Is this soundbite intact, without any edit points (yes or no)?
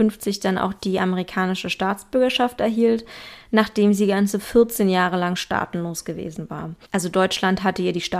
no